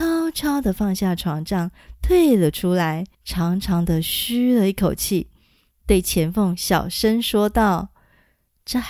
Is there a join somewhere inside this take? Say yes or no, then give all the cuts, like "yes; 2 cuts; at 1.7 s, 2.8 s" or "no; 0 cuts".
yes; 1 cut; at 3.1 s